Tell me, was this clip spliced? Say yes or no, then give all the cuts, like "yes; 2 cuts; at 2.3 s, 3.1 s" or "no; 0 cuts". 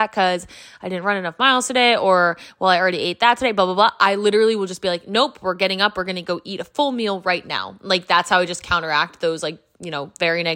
no; 0 cuts